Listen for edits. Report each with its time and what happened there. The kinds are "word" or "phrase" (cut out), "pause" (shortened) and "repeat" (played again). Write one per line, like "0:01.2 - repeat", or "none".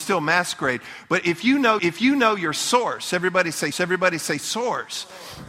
0:01.8 - repeat
0:03.7 - repeat